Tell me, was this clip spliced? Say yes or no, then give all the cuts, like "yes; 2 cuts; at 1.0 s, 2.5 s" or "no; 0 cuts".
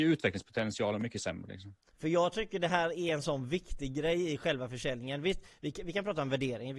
no; 0 cuts